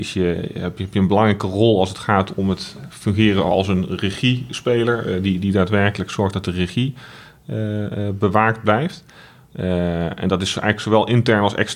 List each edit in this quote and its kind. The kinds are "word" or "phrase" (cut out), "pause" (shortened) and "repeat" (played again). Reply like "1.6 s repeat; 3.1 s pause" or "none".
none

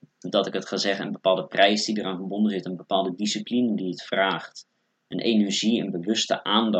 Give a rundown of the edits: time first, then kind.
none

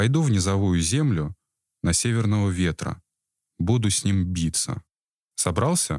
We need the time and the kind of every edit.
none

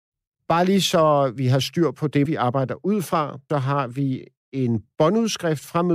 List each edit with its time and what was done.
2.3 s word; 3.5 s word

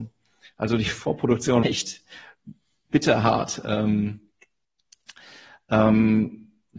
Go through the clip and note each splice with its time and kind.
1.6 s word

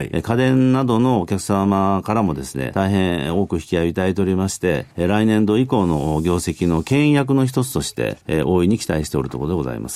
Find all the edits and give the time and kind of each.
2.7 s phrase; 4.9 s pause; 8.2 s pause

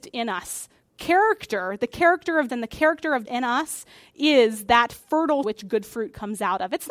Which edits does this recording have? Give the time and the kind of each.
2.5 s word; 3.3 s word; 5.4 s word

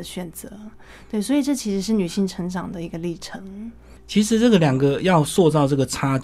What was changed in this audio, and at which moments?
none

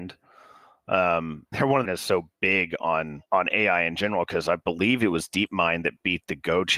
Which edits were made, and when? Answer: 1.5 s phrase; 1.8 s phrase; 3.3 s pause

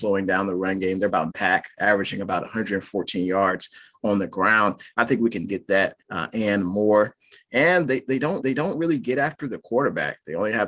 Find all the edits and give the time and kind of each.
1.3 s phrase; 5.5 s word; 6.0 s pause; 8.4 s repeat

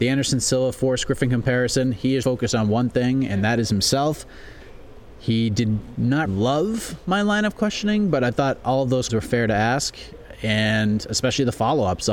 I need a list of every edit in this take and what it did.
2.2 s word; 6.3 s word; 9.1 s word

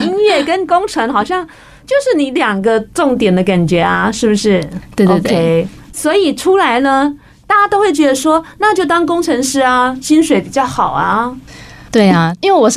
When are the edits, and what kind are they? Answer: none

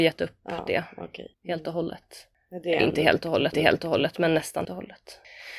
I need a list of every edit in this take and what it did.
1.3 s pause; 3.5 s repeat; 4.6 s word

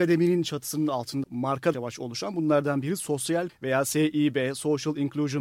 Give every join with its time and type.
1.2 s phrase; 1.7 s phrase; 3.5 s phrase

